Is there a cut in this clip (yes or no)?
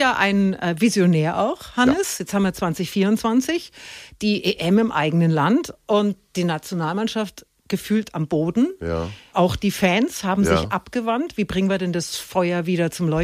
no